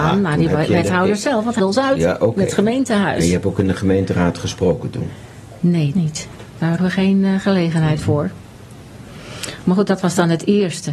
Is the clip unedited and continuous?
no; 3 cuts; at 1.6 s, 5.9 s, 6.8 s

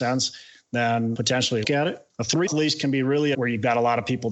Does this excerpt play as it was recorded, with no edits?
no; 4 cuts; at 1.6 s, 2.1 s, 2.5 s, 3.3 s

